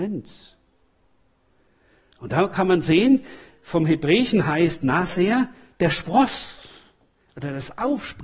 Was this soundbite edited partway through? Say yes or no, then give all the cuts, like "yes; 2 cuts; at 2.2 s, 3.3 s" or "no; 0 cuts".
no; 0 cuts